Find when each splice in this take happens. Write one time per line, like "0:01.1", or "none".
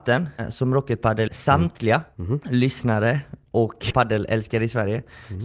0:01.3
0:03.9